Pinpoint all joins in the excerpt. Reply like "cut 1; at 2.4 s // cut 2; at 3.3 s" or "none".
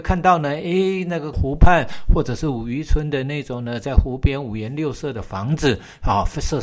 cut 1; at 1.3 s

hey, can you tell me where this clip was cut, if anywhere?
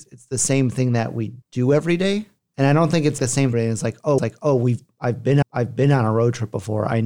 cut 1; at 1.4 s // cut 2; at 2.4 s // cut 3; at 3.2 s // cut 4; at 3.5 s // cut 5; at 4.2 s // cut 6; at 5.4 s

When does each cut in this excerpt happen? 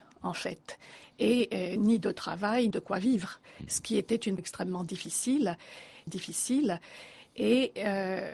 cut 1; at 1.8 s // cut 2; at 2.7 s // cut 3; at 4.4 s // cut 4; at 6.1 s

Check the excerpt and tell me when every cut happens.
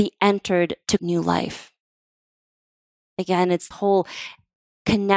cut 1; at 1.0 s // cut 2; at 3.7 s

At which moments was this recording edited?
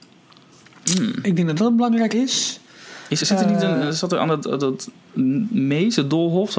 cut 1; at 2.1 s // cut 2; at 3.2 s

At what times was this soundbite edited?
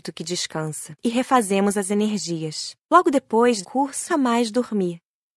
cut 1; at 1.0 s // cut 2; at 2.8 s // cut 3; at 3.6 s // cut 4; at 4.1 s

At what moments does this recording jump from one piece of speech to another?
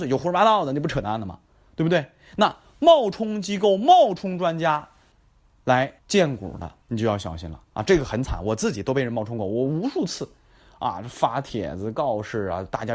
cut 1; at 6.0 s // cut 2; at 6.8 s // cut 3; at 7.6 s

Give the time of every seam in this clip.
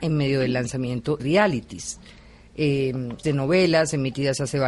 cut 1; at 1.2 s // cut 2; at 3.2 s

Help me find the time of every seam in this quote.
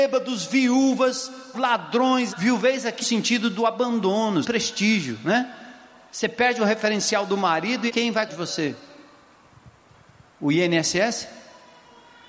cut 1; at 1.5 s // cut 2; at 2.3 s // cut 3; at 3.0 s // cut 4; at 4.4 s // cut 5; at 7.9 s // cut 6; at 8.3 s

